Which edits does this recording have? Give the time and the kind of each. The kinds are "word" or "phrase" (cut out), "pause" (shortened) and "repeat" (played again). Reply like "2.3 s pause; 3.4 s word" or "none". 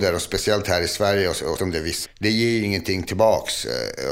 1.6 s word; 2.0 s word